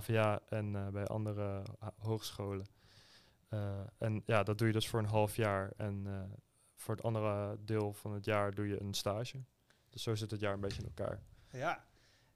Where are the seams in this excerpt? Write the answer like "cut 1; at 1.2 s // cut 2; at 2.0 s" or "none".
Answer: none